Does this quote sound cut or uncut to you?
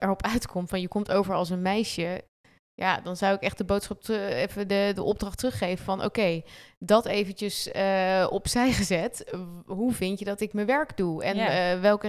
uncut